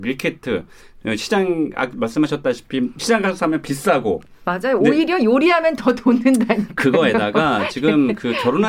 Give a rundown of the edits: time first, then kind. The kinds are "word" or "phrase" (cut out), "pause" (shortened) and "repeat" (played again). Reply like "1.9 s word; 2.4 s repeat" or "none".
none